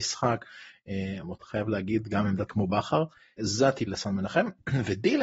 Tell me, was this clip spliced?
yes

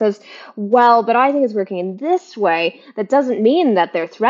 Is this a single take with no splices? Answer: yes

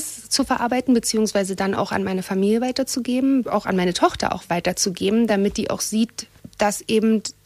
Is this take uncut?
yes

